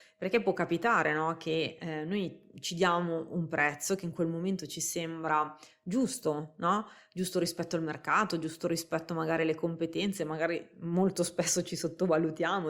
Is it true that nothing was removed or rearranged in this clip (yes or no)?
yes